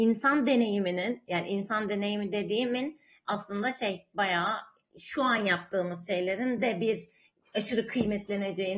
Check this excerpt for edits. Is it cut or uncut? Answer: uncut